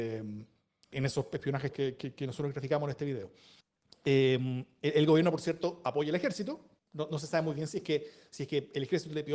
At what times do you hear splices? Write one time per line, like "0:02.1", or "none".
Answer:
0:00.9
0:01.7
0:03.6
0:06.8